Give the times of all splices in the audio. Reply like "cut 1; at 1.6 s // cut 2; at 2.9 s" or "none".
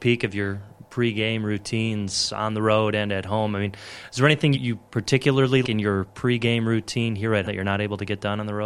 cut 1; at 4.5 s // cut 2; at 5.6 s // cut 3; at 7.5 s